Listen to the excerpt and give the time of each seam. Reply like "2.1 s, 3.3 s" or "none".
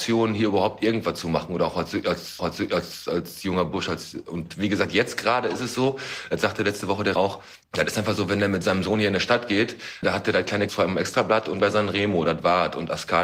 2.4 s, 7.2 s, 7.6 s, 10.0 s, 10.7 s, 11.6 s